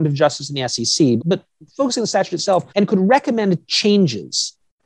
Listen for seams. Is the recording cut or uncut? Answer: cut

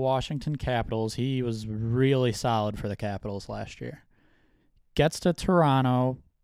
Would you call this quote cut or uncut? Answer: uncut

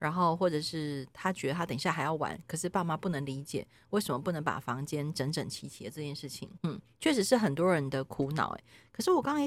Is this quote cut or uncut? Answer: cut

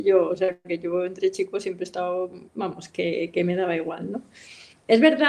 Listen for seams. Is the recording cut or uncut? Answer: cut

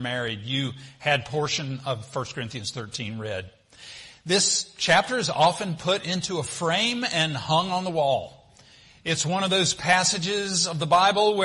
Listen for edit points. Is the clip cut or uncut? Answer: uncut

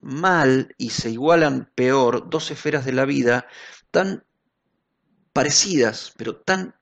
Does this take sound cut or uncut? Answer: uncut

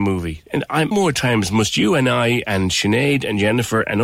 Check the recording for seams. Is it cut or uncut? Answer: cut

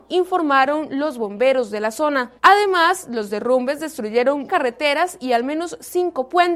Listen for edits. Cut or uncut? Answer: cut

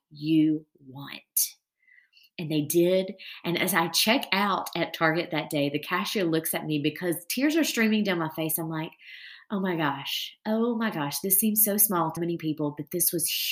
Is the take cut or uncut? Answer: cut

